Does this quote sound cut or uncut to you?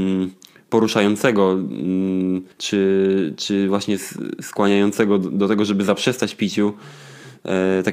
cut